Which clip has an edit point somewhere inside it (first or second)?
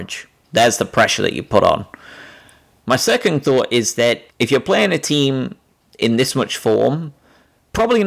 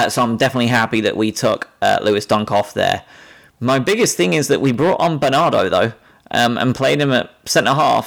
first